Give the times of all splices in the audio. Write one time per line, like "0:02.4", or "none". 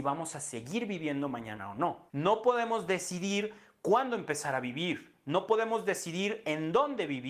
0:02.1